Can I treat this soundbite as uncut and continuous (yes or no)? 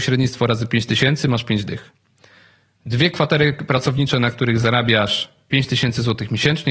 yes